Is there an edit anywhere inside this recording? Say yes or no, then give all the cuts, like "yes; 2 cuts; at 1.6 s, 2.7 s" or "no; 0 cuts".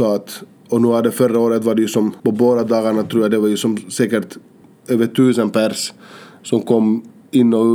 yes; 2 cuts; at 2.2 s, 4.6 s